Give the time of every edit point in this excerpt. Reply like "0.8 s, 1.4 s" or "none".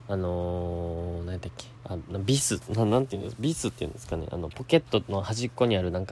1.8 s